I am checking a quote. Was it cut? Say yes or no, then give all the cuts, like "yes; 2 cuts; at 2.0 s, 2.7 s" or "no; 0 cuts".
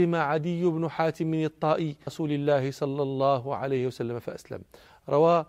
yes; 1 cut; at 2.1 s